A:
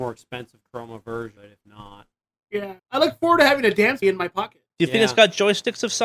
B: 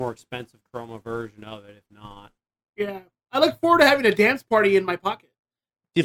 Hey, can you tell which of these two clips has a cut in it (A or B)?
A